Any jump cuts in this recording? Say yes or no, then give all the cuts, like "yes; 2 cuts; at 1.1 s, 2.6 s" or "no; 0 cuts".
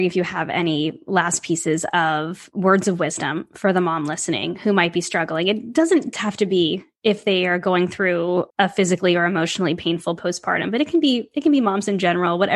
yes; 2 cuts; at 6.1 s, 8.5 s